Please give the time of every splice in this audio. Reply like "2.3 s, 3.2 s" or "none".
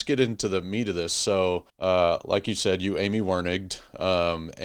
1.7 s